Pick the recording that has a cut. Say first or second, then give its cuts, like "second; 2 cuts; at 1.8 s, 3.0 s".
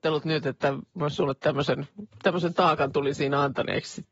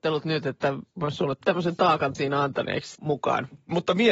second; 3 cuts; at 1.4 s, 2.1 s, 2.9 s